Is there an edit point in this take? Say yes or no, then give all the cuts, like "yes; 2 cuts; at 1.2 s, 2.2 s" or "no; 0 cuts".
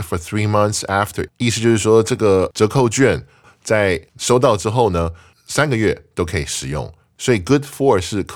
yes; 1 cut; at 1.3 s